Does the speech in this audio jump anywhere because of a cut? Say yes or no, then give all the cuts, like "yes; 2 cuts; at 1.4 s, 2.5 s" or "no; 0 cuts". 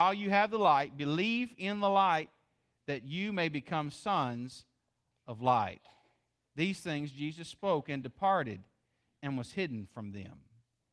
no; 0 cuts